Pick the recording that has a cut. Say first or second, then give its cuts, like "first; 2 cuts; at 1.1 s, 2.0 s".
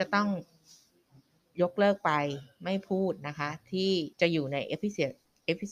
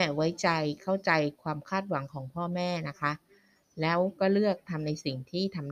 first; 1 cut; at 4.1 s